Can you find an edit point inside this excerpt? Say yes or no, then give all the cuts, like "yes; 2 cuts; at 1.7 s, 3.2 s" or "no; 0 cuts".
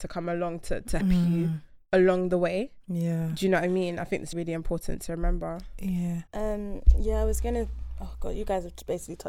yes; 4 cuts; at 1.0 s, 1.9 s, 4.3 s, 6.3 s